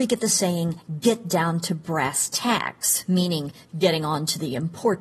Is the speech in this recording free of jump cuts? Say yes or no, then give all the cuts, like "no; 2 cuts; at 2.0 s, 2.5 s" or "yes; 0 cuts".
yes; 0 cuts